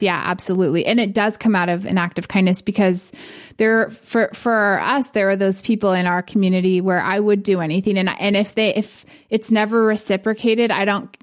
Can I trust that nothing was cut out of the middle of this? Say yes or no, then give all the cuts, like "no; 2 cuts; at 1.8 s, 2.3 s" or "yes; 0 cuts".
yes; 0 cuts